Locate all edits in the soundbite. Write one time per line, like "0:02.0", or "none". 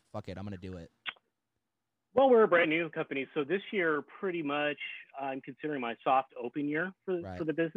none